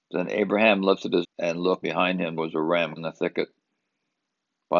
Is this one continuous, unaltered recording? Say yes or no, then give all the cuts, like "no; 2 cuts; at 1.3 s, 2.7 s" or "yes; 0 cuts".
no; 4 cuts; at 1.2 s, 1.8 s, 2.4 s, 3.0 s